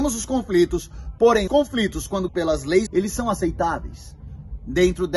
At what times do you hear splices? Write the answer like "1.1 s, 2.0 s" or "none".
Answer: 1.5 s, 2.3 s, 2.9 s